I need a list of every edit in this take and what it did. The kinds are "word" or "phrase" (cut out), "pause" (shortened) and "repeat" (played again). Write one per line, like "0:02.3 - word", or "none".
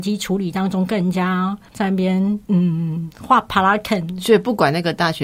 0:01.7 - pause
0:02.4 - pause